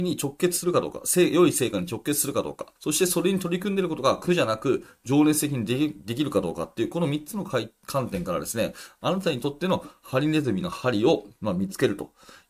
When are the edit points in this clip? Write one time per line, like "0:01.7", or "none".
0:02.8